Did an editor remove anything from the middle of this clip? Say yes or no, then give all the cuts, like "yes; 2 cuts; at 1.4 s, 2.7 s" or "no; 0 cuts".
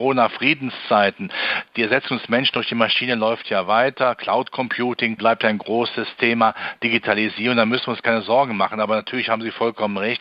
no; 0 cuts